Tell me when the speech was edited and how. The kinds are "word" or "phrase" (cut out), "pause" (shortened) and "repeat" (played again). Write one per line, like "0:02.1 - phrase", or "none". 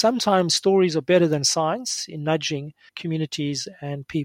0:02.9 - pause